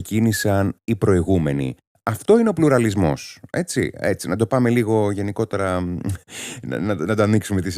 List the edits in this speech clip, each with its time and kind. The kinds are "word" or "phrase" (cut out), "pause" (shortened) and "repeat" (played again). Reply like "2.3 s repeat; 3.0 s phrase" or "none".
none